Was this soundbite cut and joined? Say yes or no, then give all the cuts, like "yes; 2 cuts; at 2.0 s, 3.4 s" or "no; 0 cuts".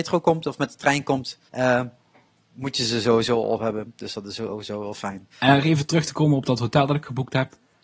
yes; 2 cuts; at 1.5 s, 5.3 s